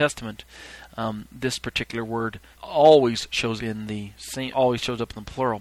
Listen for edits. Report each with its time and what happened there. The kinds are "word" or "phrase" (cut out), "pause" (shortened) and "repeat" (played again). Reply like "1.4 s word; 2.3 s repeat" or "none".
2.5 s word; 3.6 s word; 4.5 s word